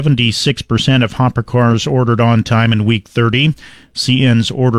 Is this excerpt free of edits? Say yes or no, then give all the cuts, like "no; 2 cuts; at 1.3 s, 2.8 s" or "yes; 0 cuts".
yes; 0 cuts